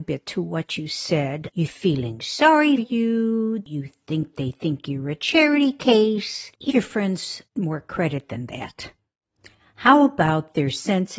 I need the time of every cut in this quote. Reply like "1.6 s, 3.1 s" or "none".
1.7 s, 2.8 s, 4.3 s, 6.7 s, 7.5 s